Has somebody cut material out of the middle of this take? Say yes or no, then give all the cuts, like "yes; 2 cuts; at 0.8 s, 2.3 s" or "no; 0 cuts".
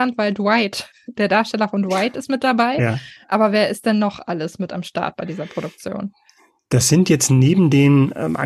no; 0 cuts